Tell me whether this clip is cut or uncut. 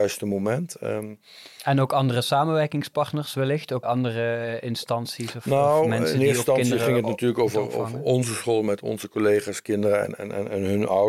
cut